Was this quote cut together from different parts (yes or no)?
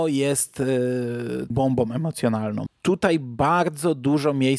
yes